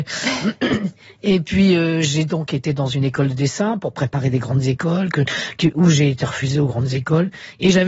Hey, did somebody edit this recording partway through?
no; 0 cuts

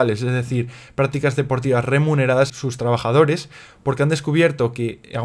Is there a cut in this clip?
yes; 1 cut; at 2.5 s

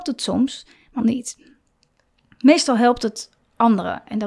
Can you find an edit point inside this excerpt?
yes; 1 cut; at 1.0 s

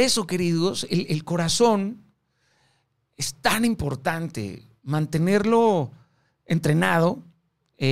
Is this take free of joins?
yes; 0 cuts

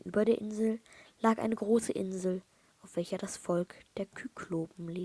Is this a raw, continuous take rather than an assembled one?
yes; 0 cuts

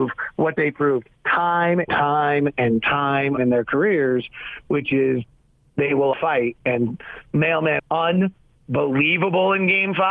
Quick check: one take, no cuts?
no; 4 cuts; at 1.9 s, 3.4 s, 6.1 s, 7.8 s

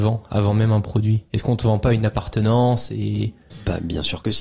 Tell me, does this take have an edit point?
yes; 1 cut; at 1.3 s

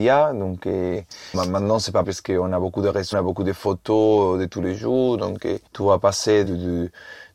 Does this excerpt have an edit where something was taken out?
yes; 5 cuts; at 1.3 s, 2.0 s, 3.1 s, 5.7 s, 6.4 s

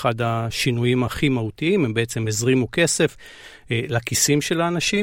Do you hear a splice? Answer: no; 0 cuts

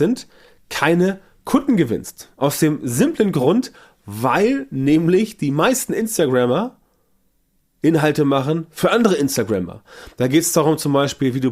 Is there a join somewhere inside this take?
no; 0 cuts

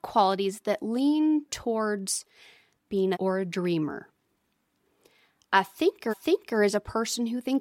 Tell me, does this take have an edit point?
yes; 3 cuts; at 1.5 s, 3.1 s, 6.1 s

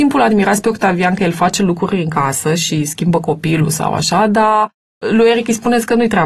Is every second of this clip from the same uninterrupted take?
yes; 0 cuts

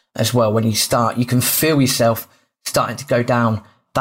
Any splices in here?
no; 0 cuts

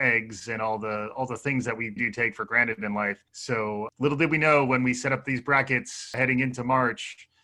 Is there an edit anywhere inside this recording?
yes; 2 cuts; at 2.0 s, 3.3 s

